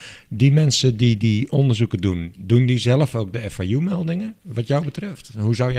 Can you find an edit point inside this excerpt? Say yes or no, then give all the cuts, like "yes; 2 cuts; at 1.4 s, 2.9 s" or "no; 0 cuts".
no; 0 cuts